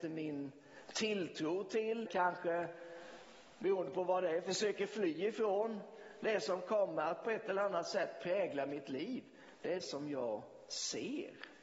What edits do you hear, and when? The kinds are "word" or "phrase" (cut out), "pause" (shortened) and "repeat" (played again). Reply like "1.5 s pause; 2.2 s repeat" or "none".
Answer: 2.1 s word; 9.8 s word